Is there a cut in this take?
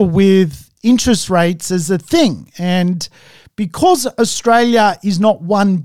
no; 0 cuts

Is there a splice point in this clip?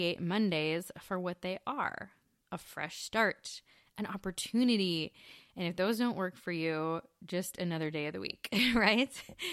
no; 0 cuts

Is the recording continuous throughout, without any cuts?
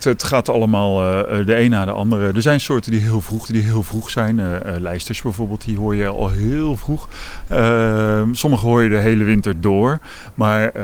no; 1 cut; at 3.4 s

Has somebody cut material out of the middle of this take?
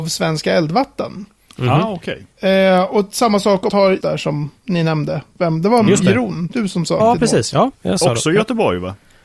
yes; 3 cuts; at 3.7 s, 4.0 s, 7.0 s

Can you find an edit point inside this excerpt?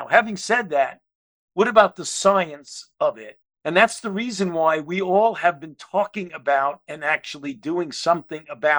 no; 0 cuts

